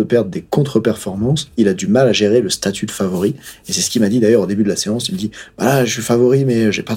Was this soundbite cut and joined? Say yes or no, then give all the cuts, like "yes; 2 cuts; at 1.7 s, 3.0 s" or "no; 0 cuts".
no; 0 cuts